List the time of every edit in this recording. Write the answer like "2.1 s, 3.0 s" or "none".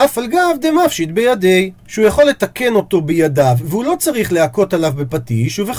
1.8 s